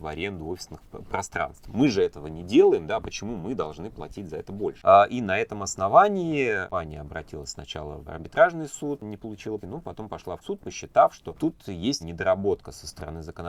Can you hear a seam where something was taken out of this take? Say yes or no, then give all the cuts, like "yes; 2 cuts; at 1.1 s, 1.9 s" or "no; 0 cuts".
yes; 4 cuts; at 8.1 s, 9.6 s, 10.4 s, 12.0 s